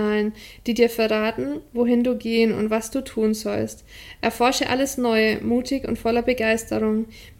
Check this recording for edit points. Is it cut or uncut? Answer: uncut